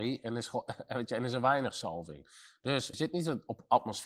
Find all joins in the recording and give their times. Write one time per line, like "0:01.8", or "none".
0:02.9